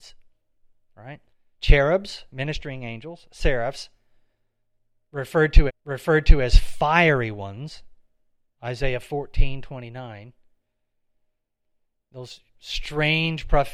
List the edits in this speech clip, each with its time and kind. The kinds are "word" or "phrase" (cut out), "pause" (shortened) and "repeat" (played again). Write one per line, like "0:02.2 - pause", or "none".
0:01.3 - pause
0:05.7 - repeat